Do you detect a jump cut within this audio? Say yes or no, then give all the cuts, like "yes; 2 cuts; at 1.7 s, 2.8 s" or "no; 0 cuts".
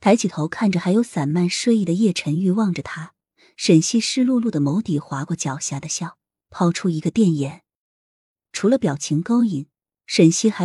no; 0 cuts